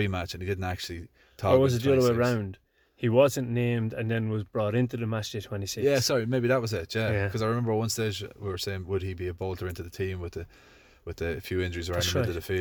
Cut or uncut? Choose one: uncut